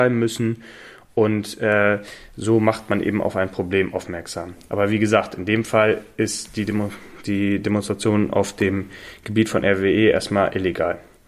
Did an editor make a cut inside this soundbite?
no; 0 cuts

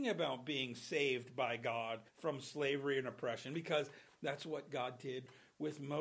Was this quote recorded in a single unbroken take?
no; 1 cut; at 2.1 s

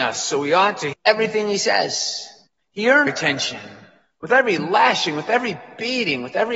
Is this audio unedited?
no; 3 cuts; at 0.9 s, 2.5 s, 3.1 s

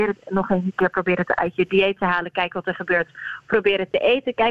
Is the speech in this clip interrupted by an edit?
no; 0 cuts

